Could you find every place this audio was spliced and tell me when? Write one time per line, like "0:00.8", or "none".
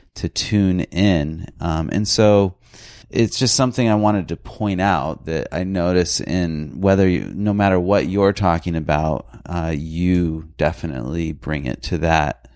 0:03.0